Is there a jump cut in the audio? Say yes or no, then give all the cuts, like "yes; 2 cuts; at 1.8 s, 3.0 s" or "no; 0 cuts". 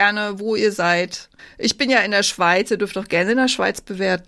yes; 1 cut; at 1.4 s